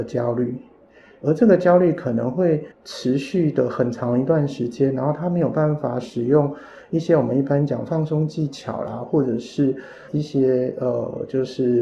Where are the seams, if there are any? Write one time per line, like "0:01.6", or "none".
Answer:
0:02.7